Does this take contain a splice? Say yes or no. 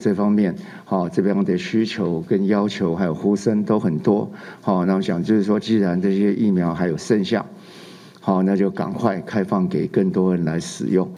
no